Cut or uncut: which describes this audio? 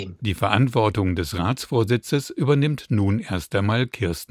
uncut